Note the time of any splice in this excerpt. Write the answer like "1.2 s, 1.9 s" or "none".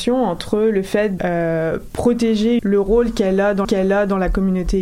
1.2 s, 2.6 s, 3.6 s